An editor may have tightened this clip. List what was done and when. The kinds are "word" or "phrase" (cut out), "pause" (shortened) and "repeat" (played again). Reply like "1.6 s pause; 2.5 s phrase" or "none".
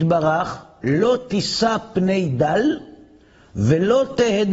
none